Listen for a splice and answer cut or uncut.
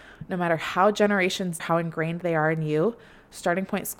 cut